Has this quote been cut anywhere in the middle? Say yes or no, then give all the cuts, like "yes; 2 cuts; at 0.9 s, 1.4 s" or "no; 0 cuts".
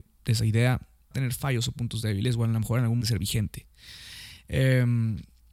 yes; 2 cuts; at 1.1 s, 3.0 s